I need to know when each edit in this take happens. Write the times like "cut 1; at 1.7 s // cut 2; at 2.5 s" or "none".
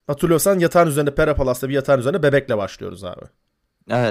none